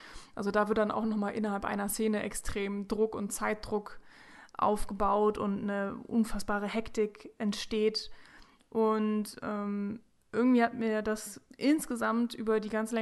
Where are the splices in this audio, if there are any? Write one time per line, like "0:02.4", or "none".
none